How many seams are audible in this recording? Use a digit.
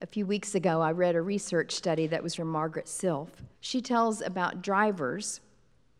2